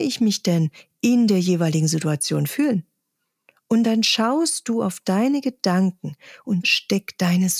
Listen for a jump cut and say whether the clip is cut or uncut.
cut